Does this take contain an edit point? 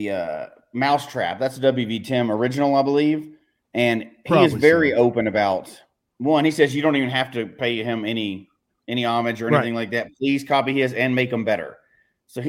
no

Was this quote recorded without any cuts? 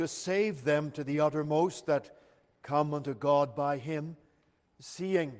yes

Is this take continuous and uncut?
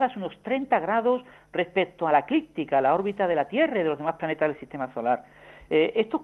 yes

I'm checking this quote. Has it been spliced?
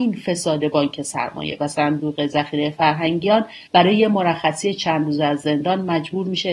yes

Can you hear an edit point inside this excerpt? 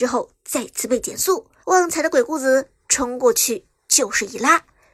yes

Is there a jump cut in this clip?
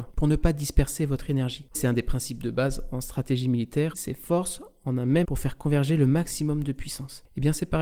yes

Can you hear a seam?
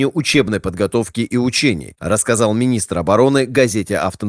no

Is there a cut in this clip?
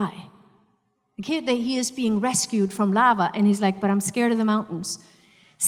no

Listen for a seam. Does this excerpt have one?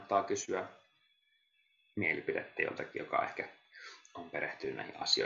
no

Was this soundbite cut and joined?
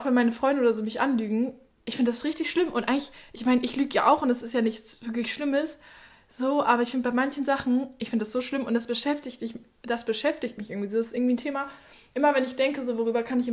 no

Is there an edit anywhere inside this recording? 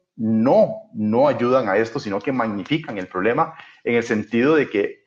no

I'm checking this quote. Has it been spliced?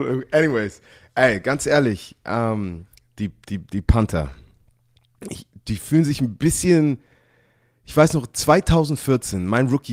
no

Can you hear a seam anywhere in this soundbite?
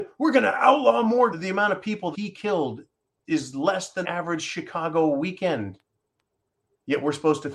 yes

